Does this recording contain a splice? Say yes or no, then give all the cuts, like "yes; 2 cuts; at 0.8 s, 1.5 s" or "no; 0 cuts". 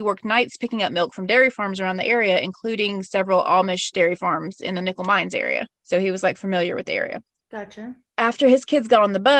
yes; 2 cuts; at 5.7 s, 7.4 s